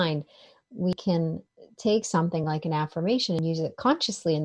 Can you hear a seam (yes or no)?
no